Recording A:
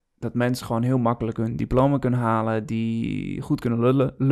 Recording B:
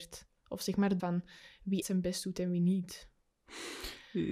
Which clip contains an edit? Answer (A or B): B